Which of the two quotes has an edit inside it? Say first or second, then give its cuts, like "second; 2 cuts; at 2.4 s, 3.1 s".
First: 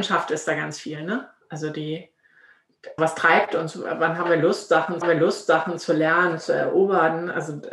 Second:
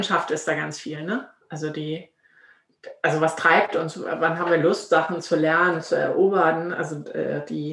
first; 2 cuts; at 3.0 s, 5.0 s